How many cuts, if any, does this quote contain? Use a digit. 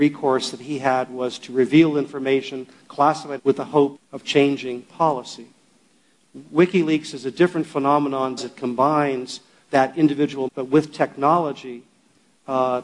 4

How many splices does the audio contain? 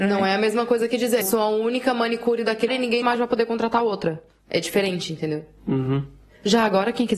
3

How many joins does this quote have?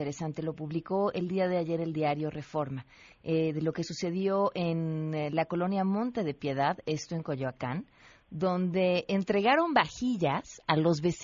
0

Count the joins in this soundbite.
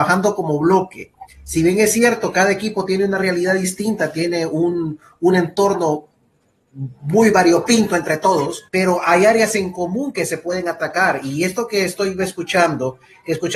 1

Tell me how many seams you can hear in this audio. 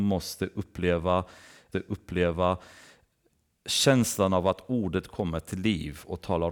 1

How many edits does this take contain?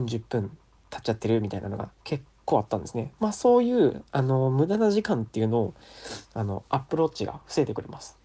1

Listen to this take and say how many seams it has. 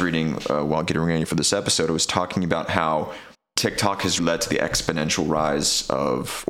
2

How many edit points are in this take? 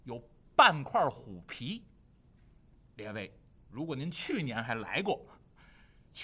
0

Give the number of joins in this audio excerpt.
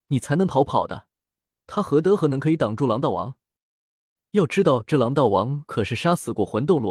0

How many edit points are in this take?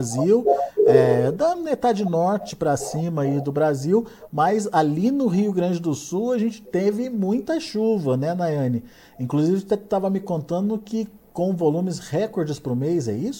0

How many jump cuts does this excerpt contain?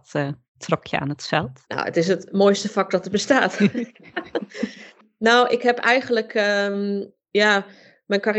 1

